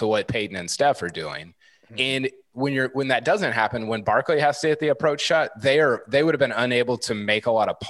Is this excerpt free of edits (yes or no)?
yes